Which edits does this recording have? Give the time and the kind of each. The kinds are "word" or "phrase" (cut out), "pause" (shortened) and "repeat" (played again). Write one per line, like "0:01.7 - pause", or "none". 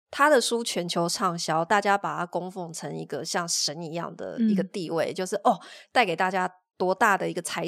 none